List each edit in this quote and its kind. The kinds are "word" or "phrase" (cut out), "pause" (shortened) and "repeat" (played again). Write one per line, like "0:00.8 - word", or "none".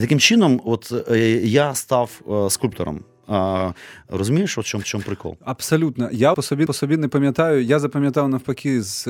0:04.8 - repeat
0:06.3 - word
0:06.7 - repeat